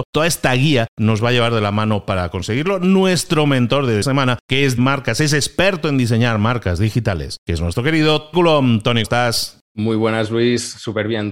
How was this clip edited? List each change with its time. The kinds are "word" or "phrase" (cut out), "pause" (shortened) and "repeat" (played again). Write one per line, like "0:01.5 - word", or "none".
0:04.0 - word
0:04.8 - phrase
0:08.3 - word
0:09.0 - word
0:09.6 - pause